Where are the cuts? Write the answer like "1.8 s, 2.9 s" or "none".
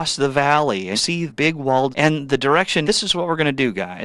0.9 s, 1.3 s, 1.9 s, 2.8 s

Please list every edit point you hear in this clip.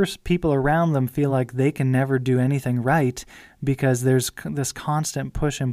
none

